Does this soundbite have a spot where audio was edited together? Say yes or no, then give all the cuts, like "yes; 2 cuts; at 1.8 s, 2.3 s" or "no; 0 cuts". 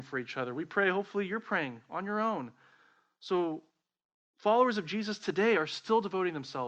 no; 0 cuts